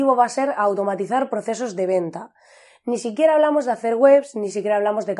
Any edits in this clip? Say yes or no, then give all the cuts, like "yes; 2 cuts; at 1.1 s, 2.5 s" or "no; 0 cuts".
no; 0 cuts